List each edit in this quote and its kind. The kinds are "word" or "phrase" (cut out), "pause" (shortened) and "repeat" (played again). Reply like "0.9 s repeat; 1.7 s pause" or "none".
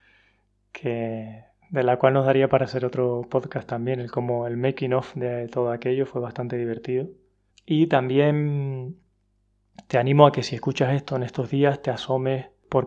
7.5 s pause